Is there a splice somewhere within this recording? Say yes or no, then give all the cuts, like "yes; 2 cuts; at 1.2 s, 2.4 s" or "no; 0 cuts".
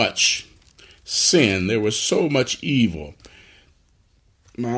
no; 0 cuts